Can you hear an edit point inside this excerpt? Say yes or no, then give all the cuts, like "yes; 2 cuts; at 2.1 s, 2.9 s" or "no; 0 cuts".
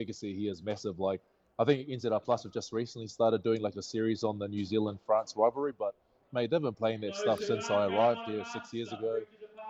no; 0 cuts